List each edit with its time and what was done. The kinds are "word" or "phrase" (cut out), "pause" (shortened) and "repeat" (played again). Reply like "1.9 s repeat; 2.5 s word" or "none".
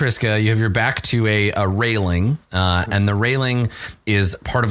2.4 s pause

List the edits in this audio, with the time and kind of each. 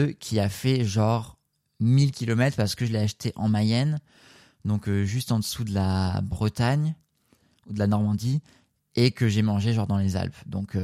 none

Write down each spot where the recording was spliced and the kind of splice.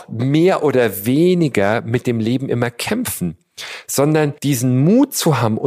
4.4 s pause

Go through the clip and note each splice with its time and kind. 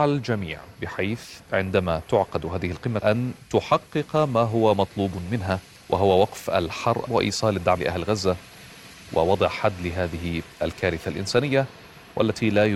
3.0 s phrase; 5.8 s pause; 7.1 s word; 7.8 s word

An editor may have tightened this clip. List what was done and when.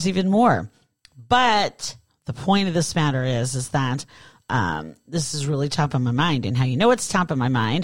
none

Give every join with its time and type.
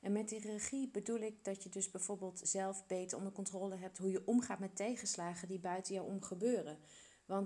none

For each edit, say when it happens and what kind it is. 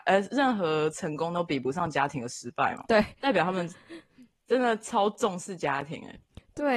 2.9 s word

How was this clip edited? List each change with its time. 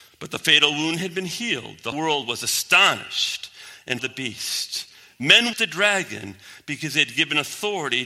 1.9 s word; 4.0 s word; 5.5 s word

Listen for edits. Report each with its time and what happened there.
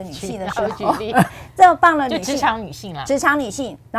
1.3 s phrase

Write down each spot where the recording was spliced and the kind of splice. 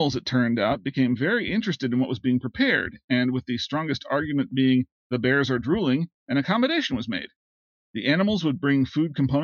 none

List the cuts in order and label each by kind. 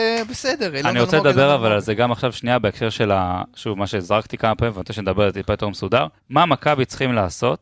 6.2 s pause

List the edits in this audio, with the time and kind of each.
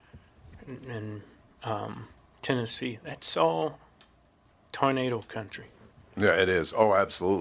none

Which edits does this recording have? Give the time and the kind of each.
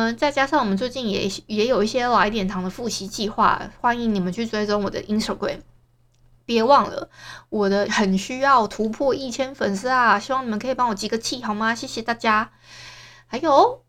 7.9 s word

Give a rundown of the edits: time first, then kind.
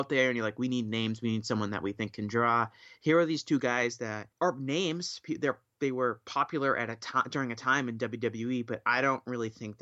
4.3 s pause

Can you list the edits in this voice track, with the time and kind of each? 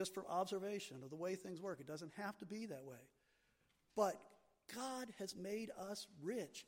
none

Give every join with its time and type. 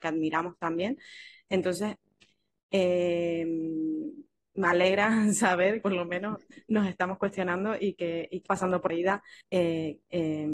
5.8 s word; 8.5 s phrase; 8.9 s word; 9.4 s pause

